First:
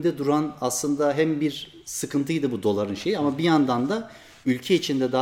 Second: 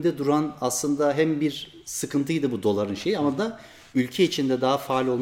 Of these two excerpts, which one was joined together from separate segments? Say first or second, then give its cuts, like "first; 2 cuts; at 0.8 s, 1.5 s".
second; 1 cut; at 3.4 s